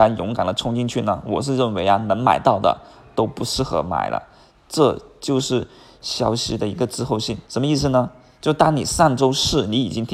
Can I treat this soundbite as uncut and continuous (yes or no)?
no